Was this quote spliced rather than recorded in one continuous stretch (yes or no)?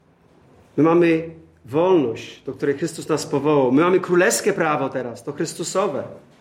no